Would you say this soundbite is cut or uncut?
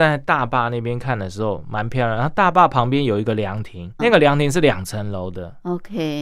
cut